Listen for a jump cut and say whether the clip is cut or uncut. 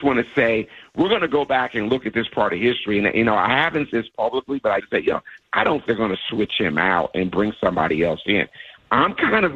cut